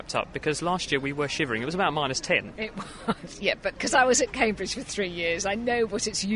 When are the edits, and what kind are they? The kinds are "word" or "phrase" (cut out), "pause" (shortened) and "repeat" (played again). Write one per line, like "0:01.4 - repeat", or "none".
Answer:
0:03.7 - word

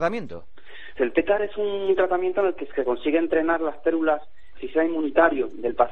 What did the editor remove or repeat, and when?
0:01.0 - word
0:02.7 - word
0:04.5 - word

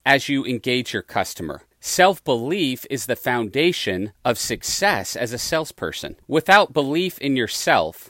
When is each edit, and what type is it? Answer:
0:01.7 - pause
0:04.2 - pause
0:06.2 - pause

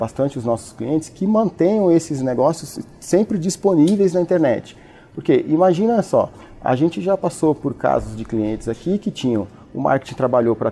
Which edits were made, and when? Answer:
none

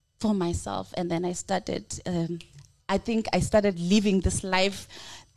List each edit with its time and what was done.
none

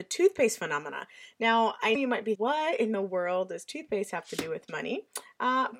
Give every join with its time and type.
0:01.9 - word
0:02.3 - word

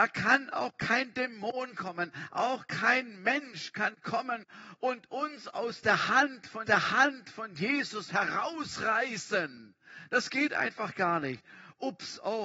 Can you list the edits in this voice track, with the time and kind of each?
0:06.7 - repeat

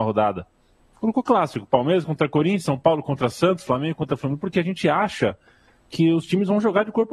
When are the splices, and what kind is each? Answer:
none

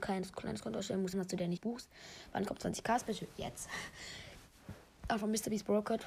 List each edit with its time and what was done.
0:01.1 - word
0:01.6 - word

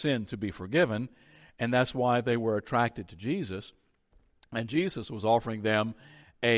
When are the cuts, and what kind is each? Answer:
none

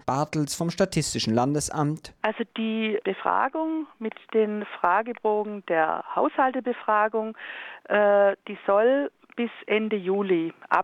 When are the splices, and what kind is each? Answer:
0:03.0 - word

